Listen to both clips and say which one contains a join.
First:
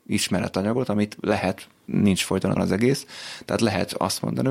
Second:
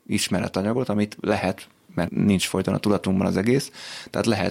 first; 2 cuts; at 1.9 s, 2.6 s

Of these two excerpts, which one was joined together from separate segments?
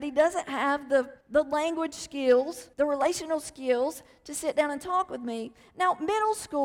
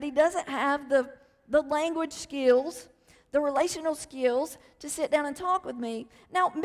first; 2 cuts; at 1.2 s, 2.7 s

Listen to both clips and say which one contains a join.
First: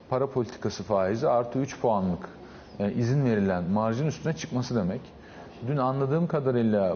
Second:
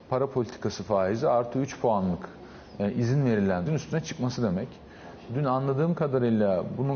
second; 1 cut; at 3.7 s

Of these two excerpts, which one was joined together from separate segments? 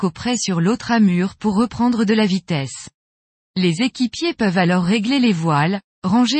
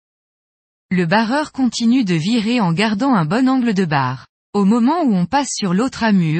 second; 1 cut; at 4.4 s

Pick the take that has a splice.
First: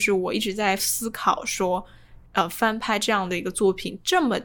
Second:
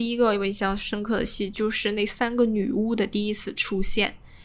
first; 1 cut; at 2.3 s

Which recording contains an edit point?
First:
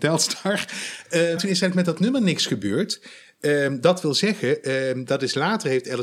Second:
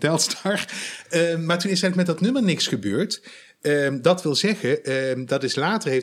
first; 1 cut; at 1.4 s

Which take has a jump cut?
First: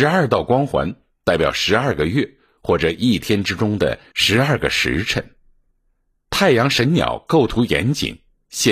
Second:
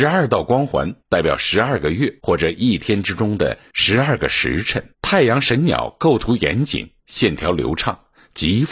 second; 4 cuts; at 1.0 s, 2.2 s, 4.9 s, 7.0 s

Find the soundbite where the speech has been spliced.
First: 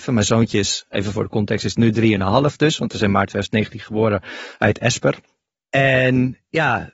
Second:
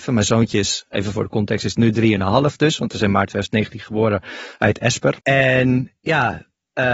second; 1 cut; at 5.2 s

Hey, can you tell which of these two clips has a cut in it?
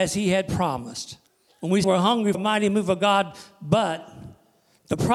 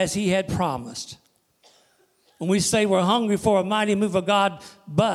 first; 3 cuts; at 1.3 s, 1.8 s, 2.3 s

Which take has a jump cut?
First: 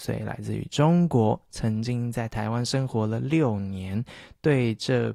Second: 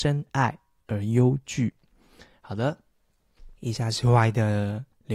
second; 1 cut; at 3.6 s

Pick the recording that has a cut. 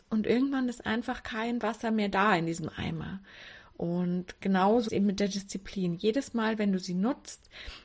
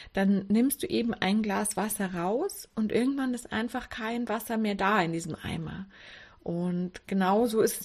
first; 1 cut; at 4.9 s

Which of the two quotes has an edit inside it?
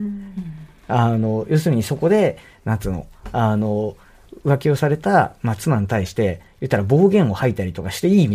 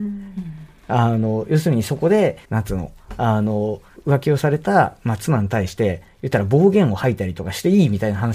second; 2 cuts; at 2.4 s, 4.0 s

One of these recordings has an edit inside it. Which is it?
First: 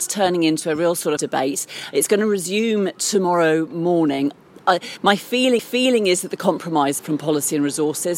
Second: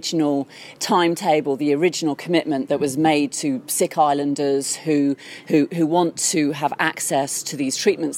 first; 3 cuts; at 1.2 s, 5.6 s, 7.0 s

